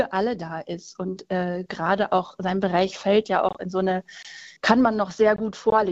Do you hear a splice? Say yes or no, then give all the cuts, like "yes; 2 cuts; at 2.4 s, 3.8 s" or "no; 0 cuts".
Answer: yes; 1 cut; at 4.6 s